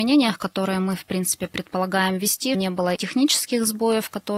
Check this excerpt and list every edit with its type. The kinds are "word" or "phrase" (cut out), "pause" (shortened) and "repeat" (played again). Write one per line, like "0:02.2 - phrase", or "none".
0:02.5 - word
0:03.0 - word